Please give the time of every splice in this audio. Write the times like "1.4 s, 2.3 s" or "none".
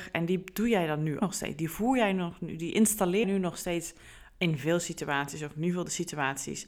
1.2 s, 3.2 s